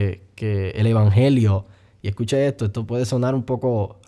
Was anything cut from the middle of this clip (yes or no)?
no